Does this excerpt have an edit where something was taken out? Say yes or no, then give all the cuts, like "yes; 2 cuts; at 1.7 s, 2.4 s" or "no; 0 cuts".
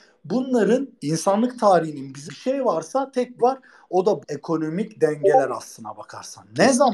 yes; 4 cuts; at 1.0 s, 2.3 s, 3.4 s, 4.2 s